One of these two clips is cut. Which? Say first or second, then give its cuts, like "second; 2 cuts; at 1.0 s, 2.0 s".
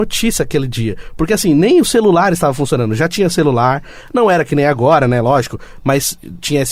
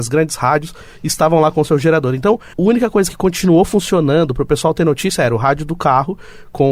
second; 1 cut; at 2.5 s